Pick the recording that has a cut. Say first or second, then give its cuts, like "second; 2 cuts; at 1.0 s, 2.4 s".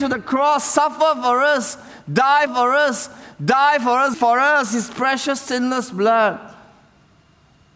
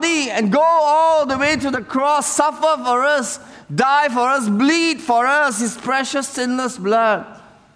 first; 2 cuts; at 2.5 s, 4.1 s